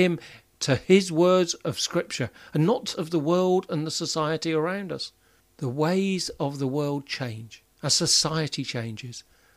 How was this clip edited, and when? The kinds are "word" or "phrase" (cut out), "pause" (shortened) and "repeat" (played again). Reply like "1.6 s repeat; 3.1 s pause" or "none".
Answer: 2.9 s phrase; 5.4 s pause; 7.7 s pause